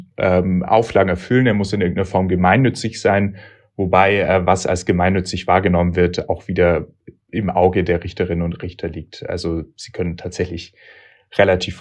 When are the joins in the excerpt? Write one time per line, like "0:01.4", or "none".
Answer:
none